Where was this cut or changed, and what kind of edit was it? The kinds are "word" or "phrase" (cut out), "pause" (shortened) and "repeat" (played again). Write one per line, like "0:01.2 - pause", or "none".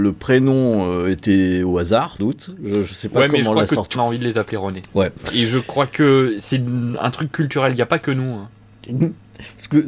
0:02.2 - word
0:03.9 - phrase